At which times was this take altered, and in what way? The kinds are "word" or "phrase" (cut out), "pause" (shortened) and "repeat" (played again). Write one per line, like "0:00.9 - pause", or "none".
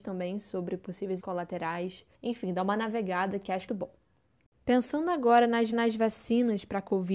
0:01.2 - word
0:02.1 - pause
0:03.7 - phrase
0:05.7 - repeat